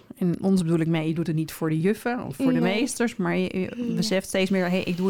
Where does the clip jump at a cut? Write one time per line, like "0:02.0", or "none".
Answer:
none